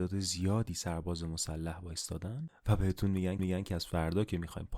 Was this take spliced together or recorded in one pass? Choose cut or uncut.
cut